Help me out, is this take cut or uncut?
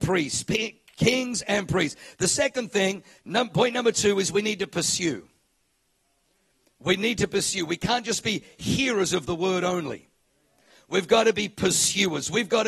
uncut